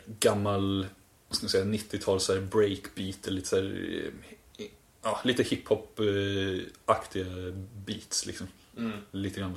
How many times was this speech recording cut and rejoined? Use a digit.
0